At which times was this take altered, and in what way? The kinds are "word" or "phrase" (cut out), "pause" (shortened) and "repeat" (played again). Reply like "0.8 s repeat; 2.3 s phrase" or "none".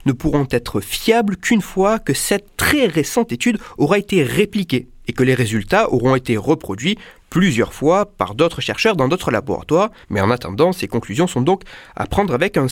10.0 s pause